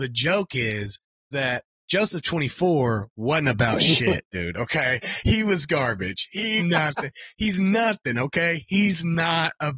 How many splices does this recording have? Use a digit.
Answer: 2